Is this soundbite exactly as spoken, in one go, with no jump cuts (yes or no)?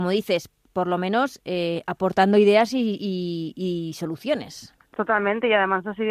yes